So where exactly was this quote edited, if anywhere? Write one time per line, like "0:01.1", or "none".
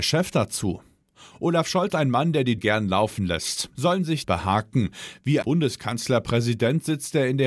0:01.9
0:02.6
0:04.2
0:05.4